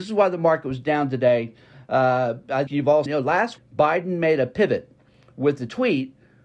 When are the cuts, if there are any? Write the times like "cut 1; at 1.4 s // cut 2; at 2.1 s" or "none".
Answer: cut 1; at 2.7 s // cut 2; at 3.1 s // cut 3; at 3.6 s